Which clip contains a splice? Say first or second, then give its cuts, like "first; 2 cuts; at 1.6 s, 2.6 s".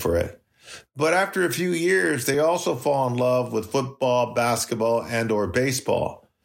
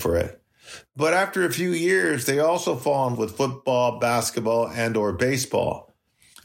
second; 1 cut; at 3.1 s